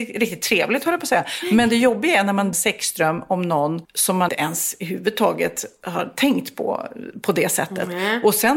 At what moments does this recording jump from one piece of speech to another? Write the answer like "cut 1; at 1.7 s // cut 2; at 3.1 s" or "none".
cut 1; at 2.5 s // cut 2; at 3.8 s // cut 3; at 4.3 s